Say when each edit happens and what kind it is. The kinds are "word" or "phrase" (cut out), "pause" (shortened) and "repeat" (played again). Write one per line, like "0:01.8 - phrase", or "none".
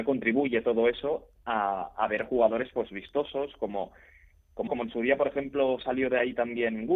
0:04.7 - word